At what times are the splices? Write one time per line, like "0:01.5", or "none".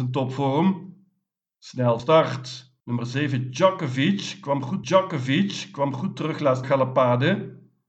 0:02.0
0:02.8
0:04.8
0:06.6